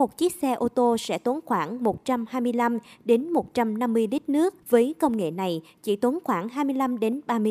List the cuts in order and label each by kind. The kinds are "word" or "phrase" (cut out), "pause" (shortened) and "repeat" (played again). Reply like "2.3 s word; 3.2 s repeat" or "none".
4.6 s pause